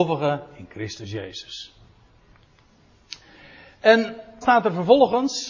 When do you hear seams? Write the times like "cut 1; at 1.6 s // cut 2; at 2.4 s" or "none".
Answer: cut 1; at 4.4 s

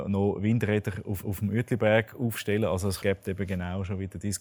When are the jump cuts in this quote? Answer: cut 1; at 1.2 s // cut 2; at 3.0 s

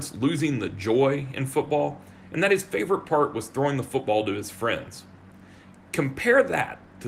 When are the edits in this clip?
none

